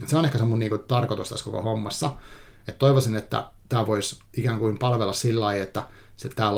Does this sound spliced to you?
yes; 1 cut; at 4.2 s

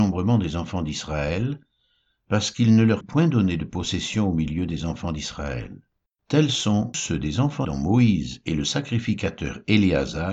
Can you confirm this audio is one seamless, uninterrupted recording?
no; 3 cuts; at 3.0 s, 6.1 s, 7.6 s

